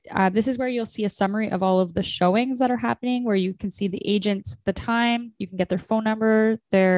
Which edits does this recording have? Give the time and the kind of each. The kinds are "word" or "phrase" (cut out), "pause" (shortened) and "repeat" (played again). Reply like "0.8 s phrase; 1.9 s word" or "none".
none